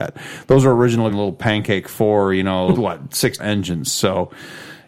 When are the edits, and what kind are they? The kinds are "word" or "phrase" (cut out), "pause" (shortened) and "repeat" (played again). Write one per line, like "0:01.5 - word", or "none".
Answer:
0:01.1 - word
0:02.7 - word
0:03.4 - word